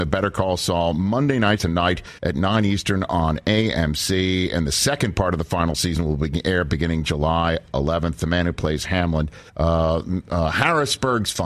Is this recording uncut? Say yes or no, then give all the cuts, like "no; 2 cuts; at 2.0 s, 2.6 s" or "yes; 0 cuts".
no; 4 cuts; at 1.6 s, 2.2 s, 8.8 s, 9.5 s